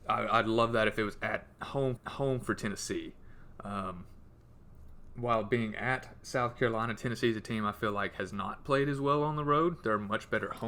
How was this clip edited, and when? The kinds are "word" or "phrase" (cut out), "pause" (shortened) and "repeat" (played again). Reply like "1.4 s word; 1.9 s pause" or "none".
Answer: 2.0 s repeat